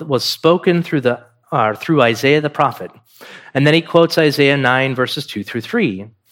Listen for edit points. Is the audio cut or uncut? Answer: uncut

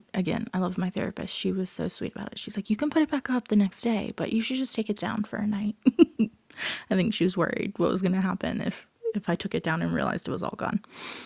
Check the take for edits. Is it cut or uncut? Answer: uncut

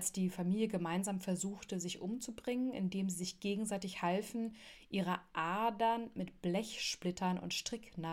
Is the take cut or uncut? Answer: uncut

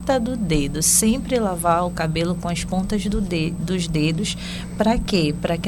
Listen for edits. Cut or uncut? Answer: uncut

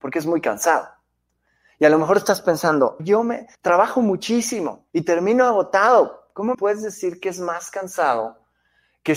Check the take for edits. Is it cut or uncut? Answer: cut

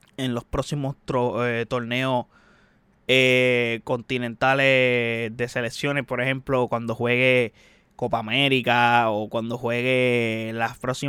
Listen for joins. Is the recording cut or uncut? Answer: uncut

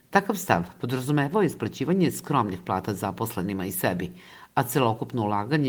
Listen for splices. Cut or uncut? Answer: uncut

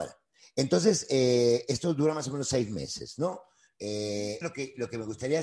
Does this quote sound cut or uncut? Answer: cut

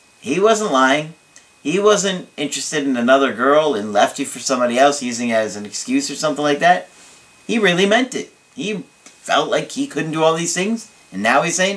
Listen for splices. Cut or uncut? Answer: uncut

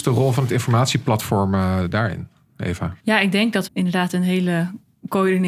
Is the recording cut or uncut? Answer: cut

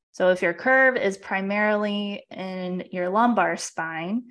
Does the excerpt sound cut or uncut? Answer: uncut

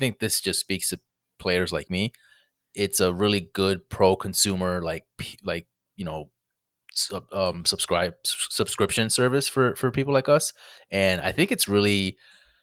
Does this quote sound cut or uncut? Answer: uncut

